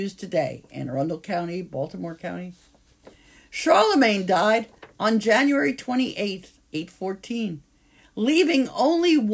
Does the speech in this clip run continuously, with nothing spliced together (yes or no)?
yes